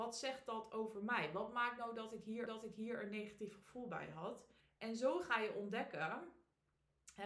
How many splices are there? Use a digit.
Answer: 2